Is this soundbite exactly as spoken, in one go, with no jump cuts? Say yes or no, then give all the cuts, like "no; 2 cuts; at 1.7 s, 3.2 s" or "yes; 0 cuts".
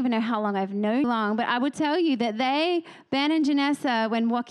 no; 1 cut; at 1.0 s